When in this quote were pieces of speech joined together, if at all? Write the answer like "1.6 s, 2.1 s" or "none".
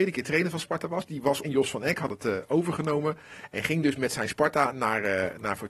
1.4 s